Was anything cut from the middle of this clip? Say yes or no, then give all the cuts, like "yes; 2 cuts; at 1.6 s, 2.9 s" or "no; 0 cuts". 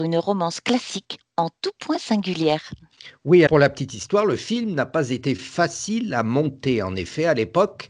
yes; 1 cut; at 3.5 s